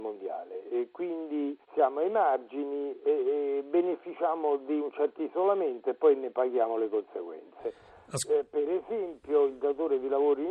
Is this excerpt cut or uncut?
cut